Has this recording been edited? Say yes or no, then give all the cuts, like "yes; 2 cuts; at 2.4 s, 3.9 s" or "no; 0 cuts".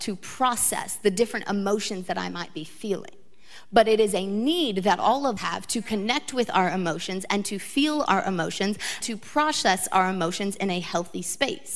yes; 2 cuts; at 5.4 s, 9.0 s